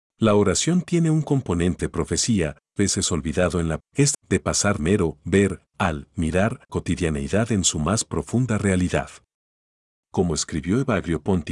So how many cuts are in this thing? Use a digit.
6